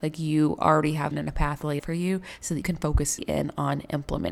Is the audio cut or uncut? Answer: cut